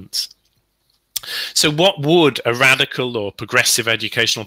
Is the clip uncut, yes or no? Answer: yes